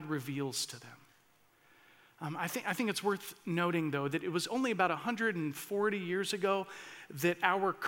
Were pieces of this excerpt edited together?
no; 0 cuts

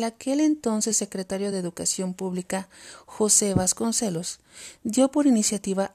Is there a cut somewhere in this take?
no; 0 cuts

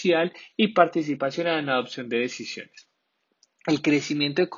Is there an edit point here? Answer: no; 0 cuts

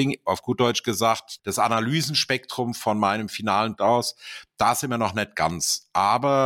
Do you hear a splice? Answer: yes; 1 cut; at 3.8 s

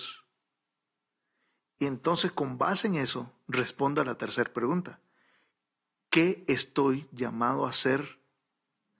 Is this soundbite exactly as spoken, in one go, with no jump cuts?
yes; 0 cuts

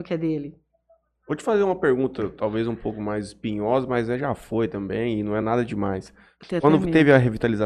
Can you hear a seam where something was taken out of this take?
no; 0 cuts

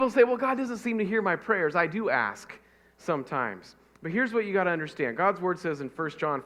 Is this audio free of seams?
yes; 0 cuts

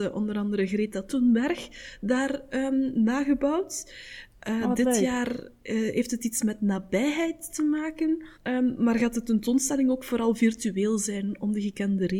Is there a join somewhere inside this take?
yes; 1 cut; at 8.3 s

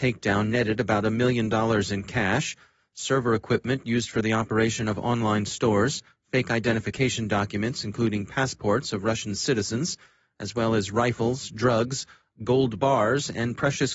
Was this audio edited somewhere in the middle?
no; 0 cuts

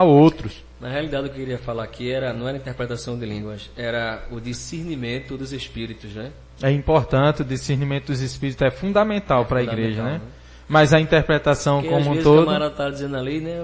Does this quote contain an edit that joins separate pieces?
no; 0 cuts

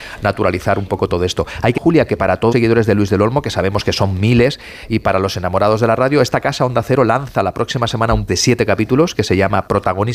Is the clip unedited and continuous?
no; 3 cuts; at 1.8 s, 2.5 s, 8.3 s

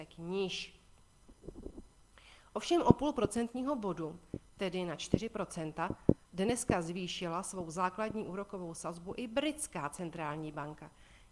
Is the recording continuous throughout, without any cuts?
yes; 0 cuts

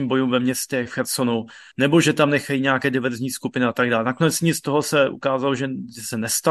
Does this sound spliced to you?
no; 0 cuts

